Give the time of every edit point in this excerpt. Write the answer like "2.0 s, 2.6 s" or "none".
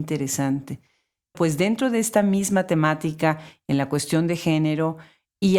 1.3 s